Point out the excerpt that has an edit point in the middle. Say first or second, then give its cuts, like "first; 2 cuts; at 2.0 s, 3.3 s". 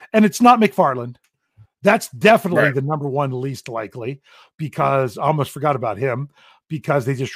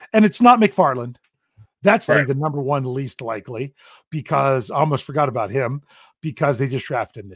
second; 1 cut; at 2.1 s